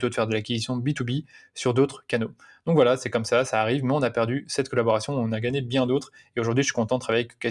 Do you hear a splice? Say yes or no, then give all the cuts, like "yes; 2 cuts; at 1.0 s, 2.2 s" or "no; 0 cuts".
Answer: no; 0 cuts